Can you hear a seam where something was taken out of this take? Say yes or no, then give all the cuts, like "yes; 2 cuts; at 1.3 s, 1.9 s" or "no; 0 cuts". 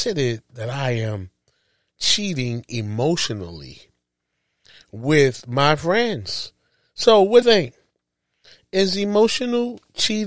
yes; 1 cut; at 7.4 s